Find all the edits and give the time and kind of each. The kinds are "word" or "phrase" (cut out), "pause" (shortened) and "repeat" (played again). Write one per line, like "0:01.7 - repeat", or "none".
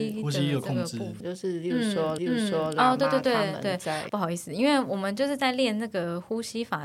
0:01.2 - phrase
0:02.2 - repeat
0:04.1 - word